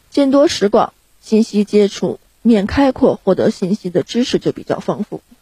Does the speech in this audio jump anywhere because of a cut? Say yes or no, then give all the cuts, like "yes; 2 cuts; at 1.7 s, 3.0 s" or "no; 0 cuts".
no; 0 cuts